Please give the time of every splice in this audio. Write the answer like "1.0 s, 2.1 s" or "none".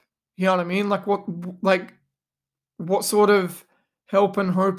none